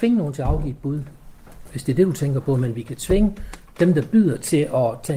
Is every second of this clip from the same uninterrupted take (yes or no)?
yes